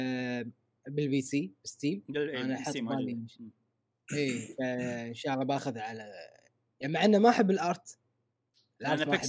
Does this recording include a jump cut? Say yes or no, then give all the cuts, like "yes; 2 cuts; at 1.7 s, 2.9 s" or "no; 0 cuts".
no; 0 cuts